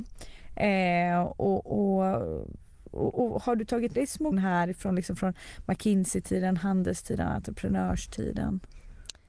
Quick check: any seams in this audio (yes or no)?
yes